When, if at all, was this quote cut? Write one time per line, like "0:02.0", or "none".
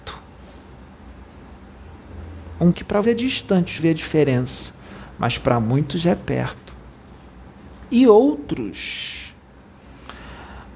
0:02.7
0:03.0
0:03.8